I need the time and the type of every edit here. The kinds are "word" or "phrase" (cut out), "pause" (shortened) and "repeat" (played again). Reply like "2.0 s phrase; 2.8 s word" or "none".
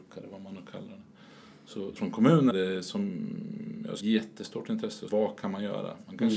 2.0 s word; 2.5 s word; 4.0 s word; 5.1 s word